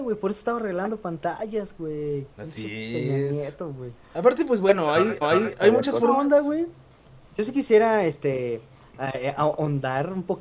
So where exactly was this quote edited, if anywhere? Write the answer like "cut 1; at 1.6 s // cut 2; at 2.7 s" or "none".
cut 1; at 2.3 s // cut 2; at 5.2 s